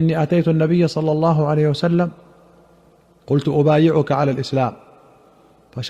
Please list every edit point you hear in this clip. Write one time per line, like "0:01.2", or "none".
none